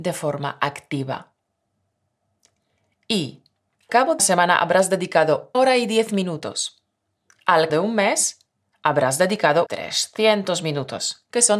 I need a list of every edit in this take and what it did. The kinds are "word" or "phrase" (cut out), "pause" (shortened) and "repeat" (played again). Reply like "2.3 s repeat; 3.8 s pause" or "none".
3.9 s word; 4.2 s word; 5.5 s word; 7.7 s word; 9.7 s word